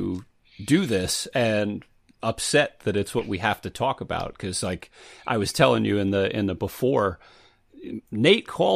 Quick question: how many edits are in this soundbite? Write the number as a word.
zero